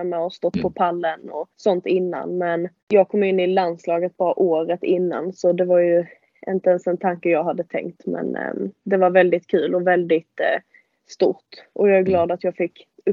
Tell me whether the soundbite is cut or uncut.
cut